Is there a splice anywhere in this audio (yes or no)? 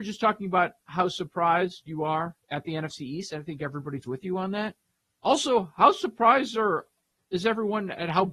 yes